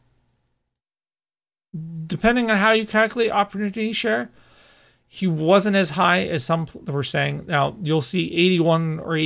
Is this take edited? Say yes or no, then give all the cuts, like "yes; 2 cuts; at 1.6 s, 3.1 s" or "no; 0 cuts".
no; 0 cuts